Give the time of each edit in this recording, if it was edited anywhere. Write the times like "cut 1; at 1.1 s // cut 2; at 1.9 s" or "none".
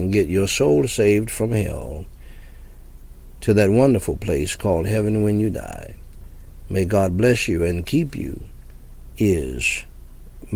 none